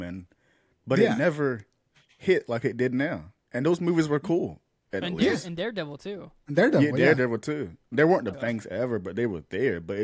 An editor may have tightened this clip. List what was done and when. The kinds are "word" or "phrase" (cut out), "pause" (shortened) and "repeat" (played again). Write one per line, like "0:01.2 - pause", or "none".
0:03.4 - pause
0:05.0 - phrase
0:08.3 - phrase